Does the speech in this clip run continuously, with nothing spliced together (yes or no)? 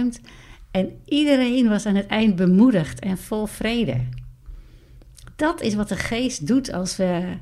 yes